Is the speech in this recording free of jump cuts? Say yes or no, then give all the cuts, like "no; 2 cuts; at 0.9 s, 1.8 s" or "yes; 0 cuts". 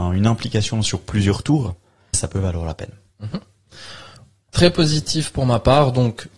no; 1 cut; at 2.1 s